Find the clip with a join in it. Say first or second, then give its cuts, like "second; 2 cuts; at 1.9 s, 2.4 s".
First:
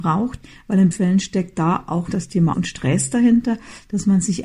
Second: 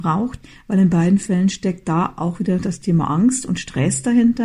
first; 3 cuts; at 0.9 s, 2.1 s, 2.5 s